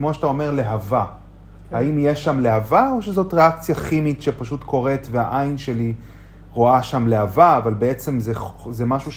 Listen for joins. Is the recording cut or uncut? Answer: uncut